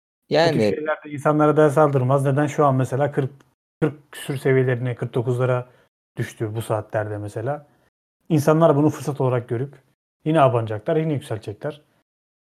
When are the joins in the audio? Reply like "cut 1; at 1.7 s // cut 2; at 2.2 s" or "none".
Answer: none